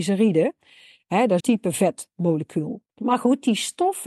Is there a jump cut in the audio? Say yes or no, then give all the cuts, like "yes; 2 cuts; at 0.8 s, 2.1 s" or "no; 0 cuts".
yes; 2 cuts; at 1.4 s, 2.9 s